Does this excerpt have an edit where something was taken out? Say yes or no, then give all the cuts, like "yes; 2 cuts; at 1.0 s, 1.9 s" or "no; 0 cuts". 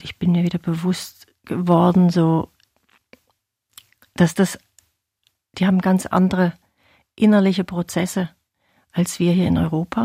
no; 0 cuts